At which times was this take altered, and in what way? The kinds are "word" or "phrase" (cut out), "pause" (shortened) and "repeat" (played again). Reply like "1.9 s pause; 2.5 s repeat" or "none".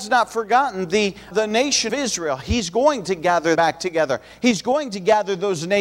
1.3 s word; 1.9 s word; 3.5 s word